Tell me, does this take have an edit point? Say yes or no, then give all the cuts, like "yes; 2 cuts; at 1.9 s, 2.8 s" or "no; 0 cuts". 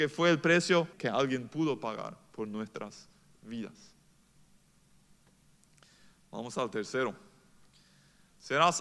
yes; 1 cut; at 0.9 s